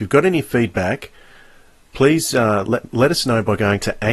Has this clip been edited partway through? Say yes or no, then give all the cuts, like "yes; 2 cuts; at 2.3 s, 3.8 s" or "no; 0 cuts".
no; 0 cuts